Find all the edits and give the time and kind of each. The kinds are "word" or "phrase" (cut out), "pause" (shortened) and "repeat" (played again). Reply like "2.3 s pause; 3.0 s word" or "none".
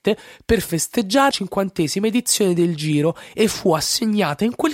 1.3 s word